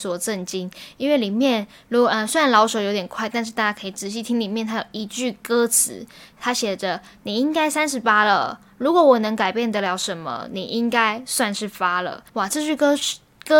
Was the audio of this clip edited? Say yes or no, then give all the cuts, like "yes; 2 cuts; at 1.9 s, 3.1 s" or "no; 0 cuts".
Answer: yes; 1 cut; at 12.3 s